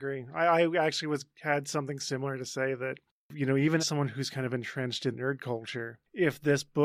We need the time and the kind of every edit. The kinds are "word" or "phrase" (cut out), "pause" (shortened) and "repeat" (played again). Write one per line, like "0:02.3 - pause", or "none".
0:03.8 - word
0:05.1 - word